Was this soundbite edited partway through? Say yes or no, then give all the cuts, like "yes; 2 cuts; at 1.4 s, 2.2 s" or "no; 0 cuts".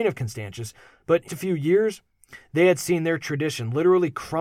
yes; 1 cut; at 1.3 s